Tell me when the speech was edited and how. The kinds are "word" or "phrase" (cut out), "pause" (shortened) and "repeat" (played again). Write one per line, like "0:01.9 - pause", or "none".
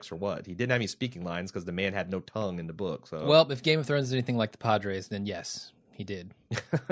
none